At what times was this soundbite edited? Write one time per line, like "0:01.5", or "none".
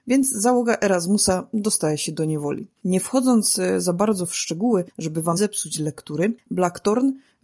0:02.8
0:04.9
0:05.4